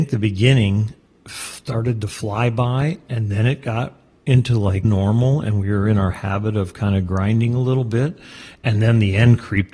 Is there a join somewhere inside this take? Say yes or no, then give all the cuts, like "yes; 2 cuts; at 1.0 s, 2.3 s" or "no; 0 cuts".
yes; 1 cut; at 4.8 s